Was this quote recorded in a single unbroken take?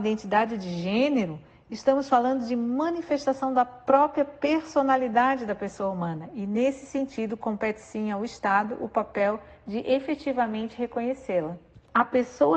yes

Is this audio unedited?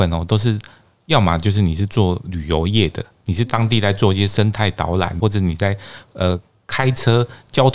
no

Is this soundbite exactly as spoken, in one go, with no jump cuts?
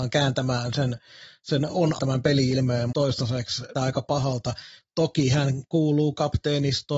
no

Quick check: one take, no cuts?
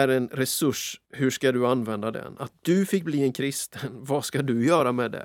no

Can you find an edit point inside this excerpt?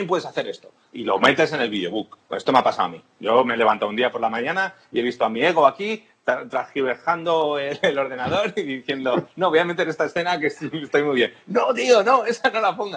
yes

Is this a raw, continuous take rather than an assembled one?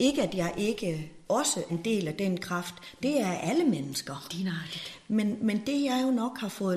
no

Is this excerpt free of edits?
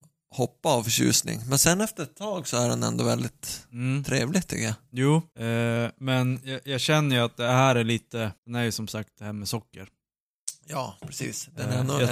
no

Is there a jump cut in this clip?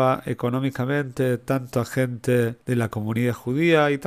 yes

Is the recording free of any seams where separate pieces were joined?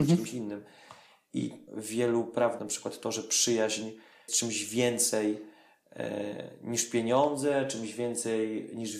no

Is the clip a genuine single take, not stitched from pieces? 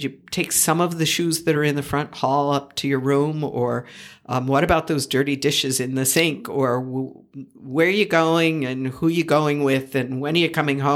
yes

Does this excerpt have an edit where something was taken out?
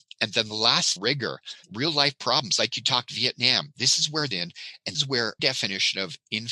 yes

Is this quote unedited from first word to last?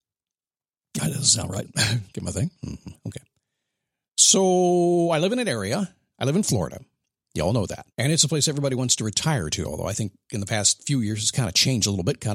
no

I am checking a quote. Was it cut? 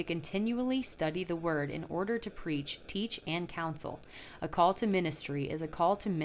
no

